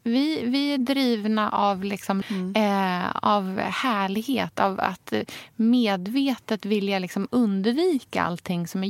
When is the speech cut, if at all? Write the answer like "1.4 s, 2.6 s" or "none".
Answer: 2.2 s